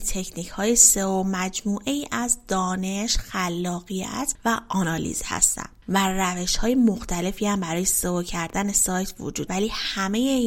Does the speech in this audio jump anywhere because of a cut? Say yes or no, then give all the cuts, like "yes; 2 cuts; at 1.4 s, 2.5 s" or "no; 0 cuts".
yes; 1 cut; at 9.5 s